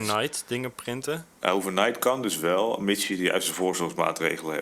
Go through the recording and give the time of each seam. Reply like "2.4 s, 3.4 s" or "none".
1.3 s